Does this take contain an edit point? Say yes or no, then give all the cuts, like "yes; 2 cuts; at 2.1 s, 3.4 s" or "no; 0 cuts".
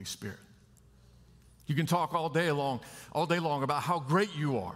no; 0 cuts